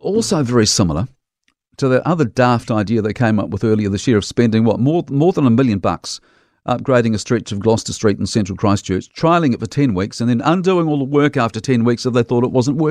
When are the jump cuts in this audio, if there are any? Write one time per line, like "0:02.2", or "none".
none